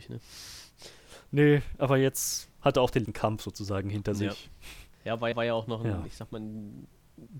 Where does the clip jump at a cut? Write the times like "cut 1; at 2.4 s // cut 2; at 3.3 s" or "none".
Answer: cut 1; at 3.0 s // cut 2; at 4.9 s // cut 3; at 5.3 s